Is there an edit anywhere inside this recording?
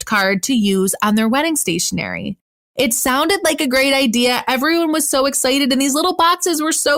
no; 0 cuts

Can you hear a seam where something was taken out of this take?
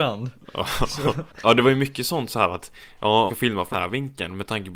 yes; 3 cuts; at 1.3 s, 3.3 s, 3.7 s

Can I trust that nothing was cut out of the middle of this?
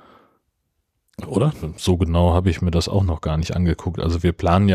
yes; 0 cuts

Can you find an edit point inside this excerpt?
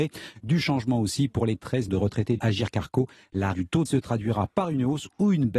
yes; 4 cuts; at 1.9 s, 2.4 s, 3.5 s, 3.9 s

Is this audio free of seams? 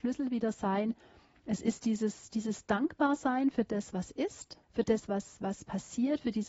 no; 1 cut; at 4.6 s

